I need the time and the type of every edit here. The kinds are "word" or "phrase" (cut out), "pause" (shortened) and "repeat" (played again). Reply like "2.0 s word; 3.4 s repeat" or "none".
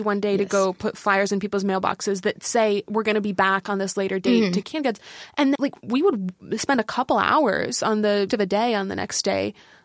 4.6 s word; 5.5 s word; 8.3 s word